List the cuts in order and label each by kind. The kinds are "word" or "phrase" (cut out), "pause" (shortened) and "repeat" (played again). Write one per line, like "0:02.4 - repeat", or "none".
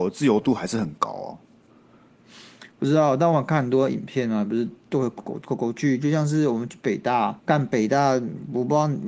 0:07.4 - pause